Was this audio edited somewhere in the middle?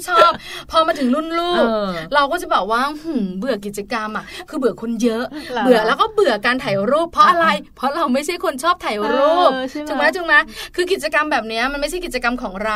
no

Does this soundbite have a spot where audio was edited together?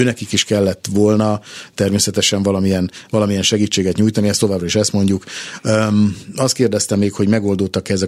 no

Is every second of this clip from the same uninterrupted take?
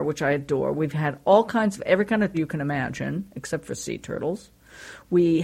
no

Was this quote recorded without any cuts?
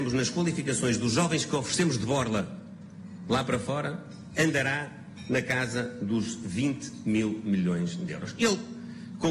yes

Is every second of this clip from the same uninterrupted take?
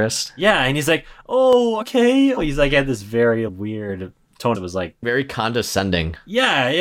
no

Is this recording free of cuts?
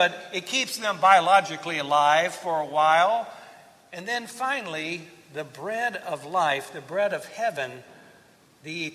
yes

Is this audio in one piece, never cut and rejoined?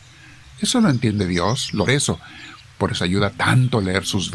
no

